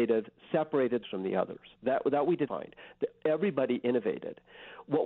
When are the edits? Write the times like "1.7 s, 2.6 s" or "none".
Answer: 1.0 s, 1.8 s, 2.5 s

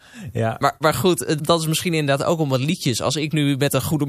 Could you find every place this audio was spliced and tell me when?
1.4 s

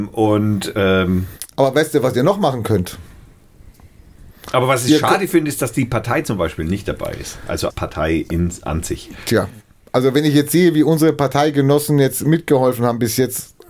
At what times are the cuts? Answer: 7.7 s

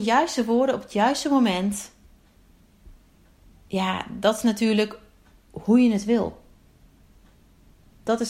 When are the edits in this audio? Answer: none

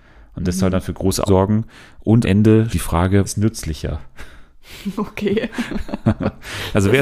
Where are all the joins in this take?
1.3 s, 2.2 s, 2.7 s, 3.2 s

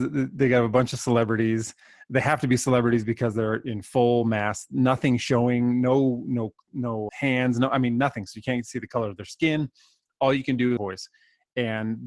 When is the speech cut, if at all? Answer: 7.1 s, 10.8 s

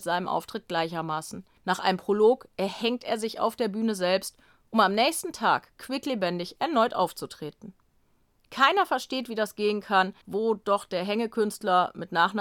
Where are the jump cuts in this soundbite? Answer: 10.2 s

